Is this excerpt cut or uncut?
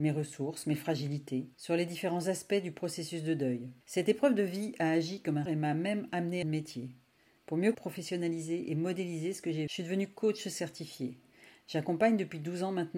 cut